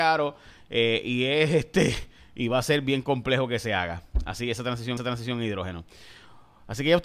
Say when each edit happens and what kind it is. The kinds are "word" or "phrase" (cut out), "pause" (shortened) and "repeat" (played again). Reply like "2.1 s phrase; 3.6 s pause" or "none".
5.0 s repeat